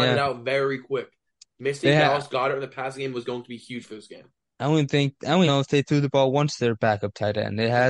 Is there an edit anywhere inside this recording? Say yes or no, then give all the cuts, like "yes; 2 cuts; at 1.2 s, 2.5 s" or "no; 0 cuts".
yes; 1 cut; at 5.5 s